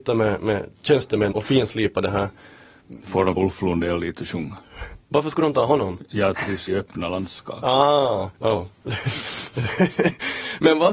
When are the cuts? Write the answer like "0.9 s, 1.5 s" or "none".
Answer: 1.3 s, 3.4 s, 6.7 s, 8.3 s